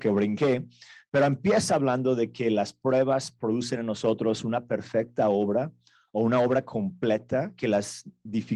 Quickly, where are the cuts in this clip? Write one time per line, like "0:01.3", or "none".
none